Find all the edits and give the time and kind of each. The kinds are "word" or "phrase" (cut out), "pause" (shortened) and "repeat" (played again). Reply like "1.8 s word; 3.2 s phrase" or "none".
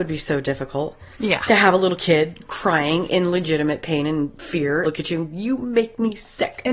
4.8 s word